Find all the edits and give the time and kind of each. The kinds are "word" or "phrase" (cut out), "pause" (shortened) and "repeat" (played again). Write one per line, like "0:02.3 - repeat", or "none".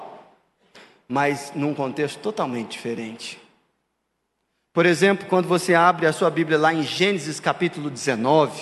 none